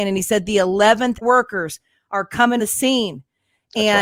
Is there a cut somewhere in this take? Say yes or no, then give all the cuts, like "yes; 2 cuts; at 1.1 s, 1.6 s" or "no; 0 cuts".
yes; 2 cuts; at 1.2 s, 2.6 s